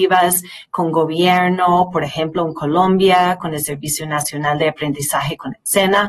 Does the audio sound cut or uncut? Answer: uncut